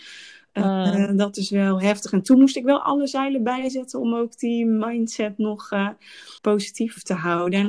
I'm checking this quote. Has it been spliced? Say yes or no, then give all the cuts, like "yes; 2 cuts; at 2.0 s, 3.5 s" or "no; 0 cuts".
yes; 1 cut; at 6.4 s